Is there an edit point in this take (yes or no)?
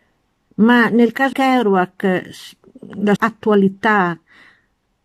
yes